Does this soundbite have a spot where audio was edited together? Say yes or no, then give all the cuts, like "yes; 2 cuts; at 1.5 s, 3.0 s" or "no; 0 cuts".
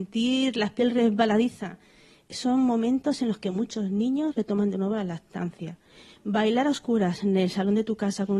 no; 0 cuts